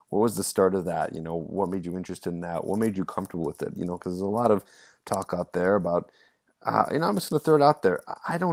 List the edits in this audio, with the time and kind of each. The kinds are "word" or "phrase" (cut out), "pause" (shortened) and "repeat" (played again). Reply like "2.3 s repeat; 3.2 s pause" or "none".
none